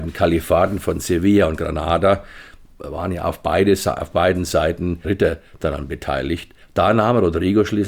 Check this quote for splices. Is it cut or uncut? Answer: cut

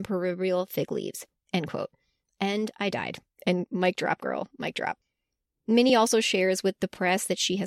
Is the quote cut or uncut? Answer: uncut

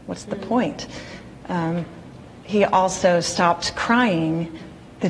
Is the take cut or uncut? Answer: uncut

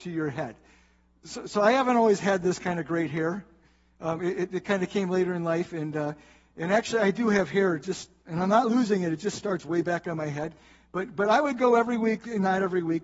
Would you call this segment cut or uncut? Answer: uncut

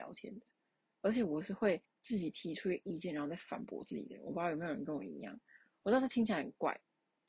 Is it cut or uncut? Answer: cut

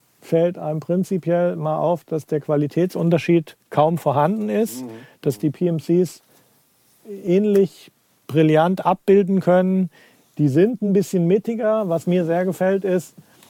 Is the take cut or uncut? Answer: uncut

